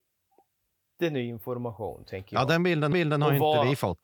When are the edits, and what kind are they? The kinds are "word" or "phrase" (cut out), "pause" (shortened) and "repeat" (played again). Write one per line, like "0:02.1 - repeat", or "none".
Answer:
0:02.9 - repeat